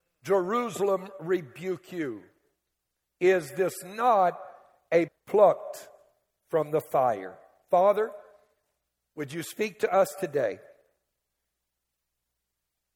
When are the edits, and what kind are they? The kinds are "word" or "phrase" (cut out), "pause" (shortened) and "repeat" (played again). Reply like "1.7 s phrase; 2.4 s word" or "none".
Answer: 5.1 s word